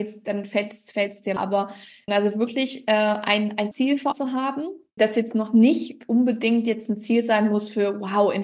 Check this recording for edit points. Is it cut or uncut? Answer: cut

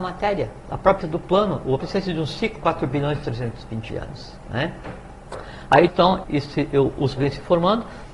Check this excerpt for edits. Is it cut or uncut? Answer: cut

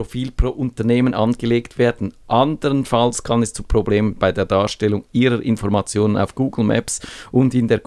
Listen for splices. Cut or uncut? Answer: uncut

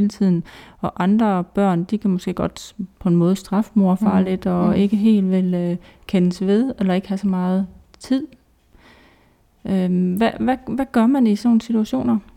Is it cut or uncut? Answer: uncut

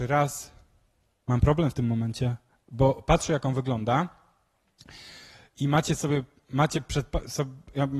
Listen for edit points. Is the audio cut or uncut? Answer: uncut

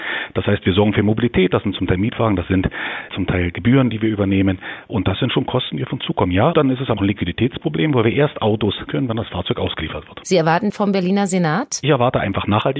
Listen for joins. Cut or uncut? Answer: cut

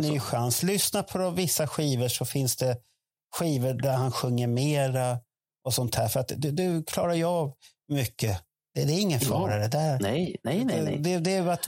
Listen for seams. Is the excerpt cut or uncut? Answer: uncut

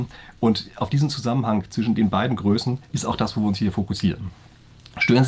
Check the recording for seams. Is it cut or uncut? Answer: uncut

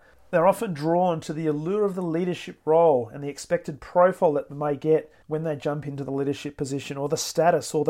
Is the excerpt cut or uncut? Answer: cut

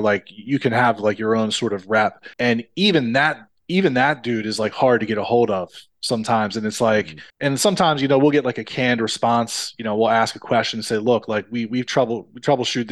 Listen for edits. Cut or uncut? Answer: cut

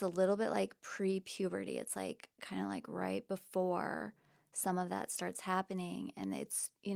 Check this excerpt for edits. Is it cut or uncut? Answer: uncut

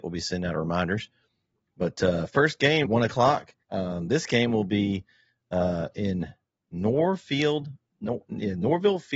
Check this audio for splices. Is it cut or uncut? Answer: cut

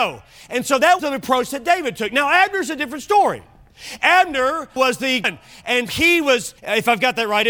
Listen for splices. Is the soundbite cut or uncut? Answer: cut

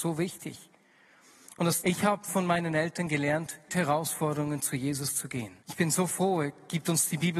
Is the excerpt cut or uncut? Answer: cut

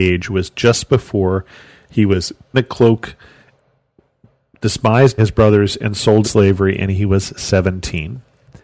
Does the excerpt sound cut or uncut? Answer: cut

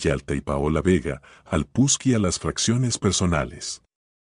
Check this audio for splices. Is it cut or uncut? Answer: uncut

